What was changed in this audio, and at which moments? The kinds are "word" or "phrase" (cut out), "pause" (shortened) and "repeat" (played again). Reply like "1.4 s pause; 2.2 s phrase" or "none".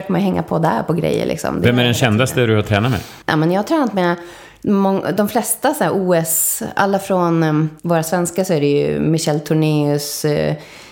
3.2 s pause; 7.8 s pause